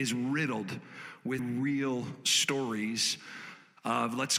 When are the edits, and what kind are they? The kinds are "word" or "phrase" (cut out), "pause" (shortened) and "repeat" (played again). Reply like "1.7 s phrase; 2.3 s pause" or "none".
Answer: 1.4 s word